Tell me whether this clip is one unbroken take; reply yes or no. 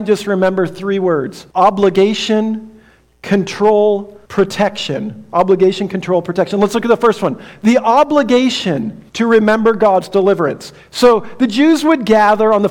no